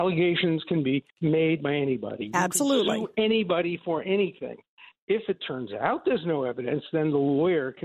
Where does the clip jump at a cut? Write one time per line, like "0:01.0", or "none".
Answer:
0:01.1